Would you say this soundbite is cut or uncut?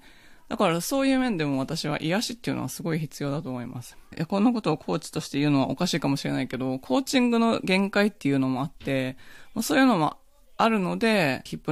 uncut